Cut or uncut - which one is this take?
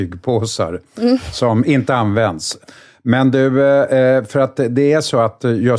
uncut